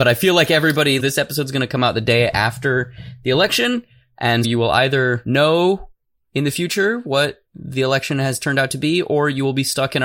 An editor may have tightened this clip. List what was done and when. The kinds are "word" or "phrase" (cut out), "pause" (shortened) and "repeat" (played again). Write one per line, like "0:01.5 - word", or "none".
0:01.0 - phrase
0:04.4 - word
0:07.5 - pause